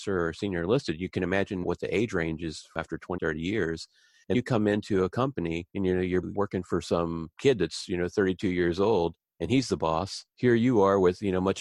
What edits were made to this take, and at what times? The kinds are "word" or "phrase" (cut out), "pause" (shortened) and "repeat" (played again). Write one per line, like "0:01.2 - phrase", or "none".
0:01.6 - phrase
0:03.2 - word
0:04.3 - word
0:05.7 - pause
0:06.2 - word
0:10.3 - word